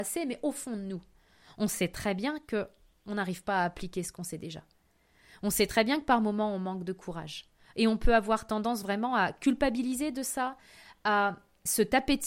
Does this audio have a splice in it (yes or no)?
no